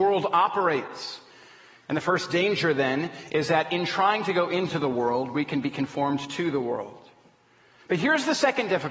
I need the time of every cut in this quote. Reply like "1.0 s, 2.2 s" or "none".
none